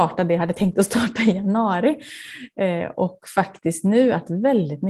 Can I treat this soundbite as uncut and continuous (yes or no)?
yes